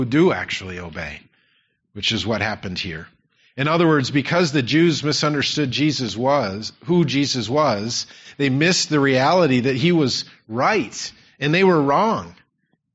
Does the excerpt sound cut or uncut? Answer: uncut